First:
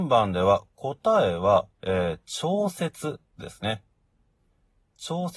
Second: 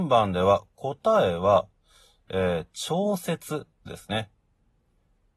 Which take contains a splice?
first; 1 cut; at 1.7 s

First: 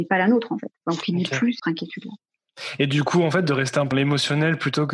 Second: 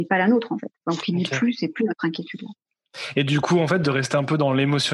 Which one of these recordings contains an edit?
first; 2 cuts; at 1.6 s, 3.9 s

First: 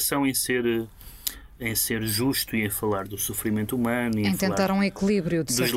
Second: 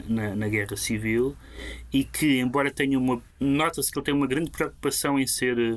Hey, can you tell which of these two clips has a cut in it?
second; 1 cut; at 3.3 s

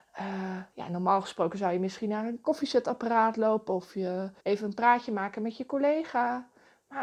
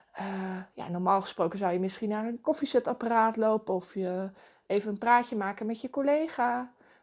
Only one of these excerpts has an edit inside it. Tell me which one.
first; 1 cut; at 4.4 s

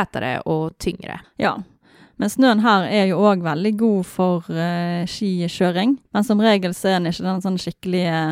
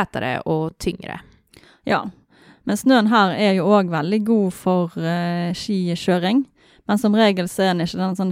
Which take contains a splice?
first; 2 cuts; at 1.2 s, 6.0 s

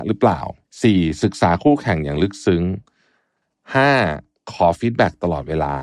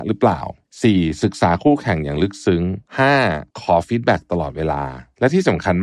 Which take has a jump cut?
second; 2 cuts; at 2.9 s, 3.5 s

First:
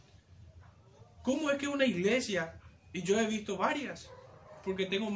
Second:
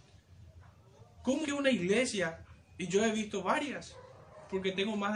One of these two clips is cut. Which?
second; 1 cut; at 1.4 s

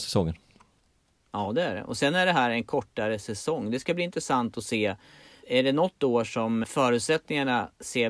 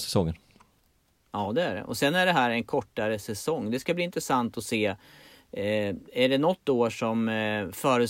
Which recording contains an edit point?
first; 2 cuts; at 5.4 s, 6.6 s

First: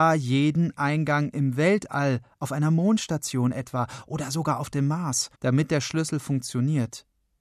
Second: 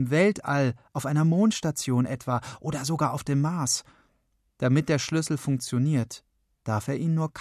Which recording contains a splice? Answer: first; 1 cut; at 5.3 s

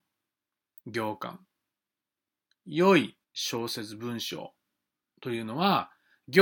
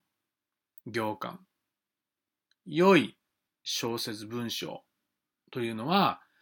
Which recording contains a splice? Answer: first; 1 cut; at 3.2 s

